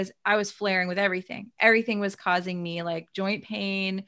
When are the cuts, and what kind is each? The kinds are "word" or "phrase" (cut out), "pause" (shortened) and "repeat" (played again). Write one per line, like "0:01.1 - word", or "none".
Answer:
none

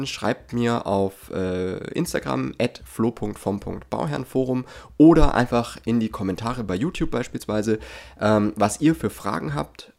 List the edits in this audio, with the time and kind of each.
none

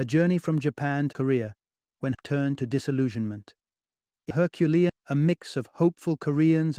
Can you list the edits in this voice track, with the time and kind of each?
0:01.1 - word
0:02.1 - word
0:04.3 - word
0:04.9 - word

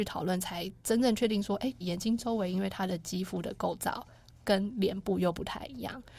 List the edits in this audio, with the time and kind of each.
0:01.8 - word

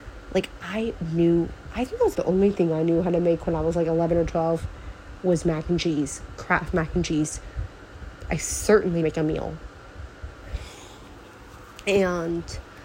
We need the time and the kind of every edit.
0:02.1 - word
0:09.0 - phrase

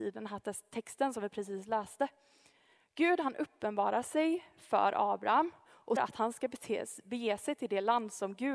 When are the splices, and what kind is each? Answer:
0:06.0 - word

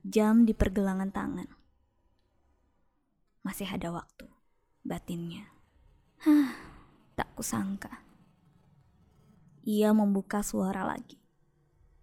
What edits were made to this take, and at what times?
none

